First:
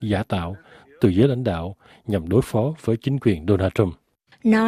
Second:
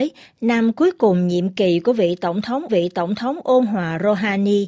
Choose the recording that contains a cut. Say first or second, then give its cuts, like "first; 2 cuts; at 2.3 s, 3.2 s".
second; 1 cut; at 2.7 s